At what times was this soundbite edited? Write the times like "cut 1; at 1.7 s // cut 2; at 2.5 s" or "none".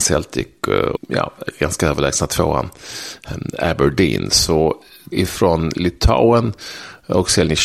cut 1; at 1.0 s // cut 2; at 5.1 s

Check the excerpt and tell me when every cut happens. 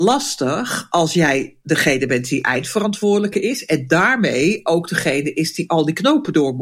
cut 1; at 1.6 s

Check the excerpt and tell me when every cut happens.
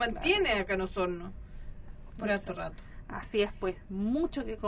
none

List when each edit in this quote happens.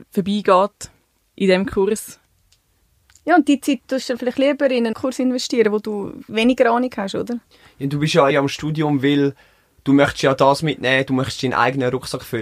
cut 1; at 4.9 s // cut 2; at 8.3 s

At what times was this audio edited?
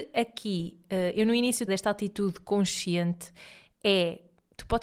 cut 1; at 1.7 s

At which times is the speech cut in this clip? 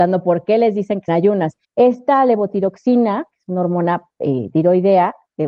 cut 1; at 1.1 s // cut 2; at 1.6 s

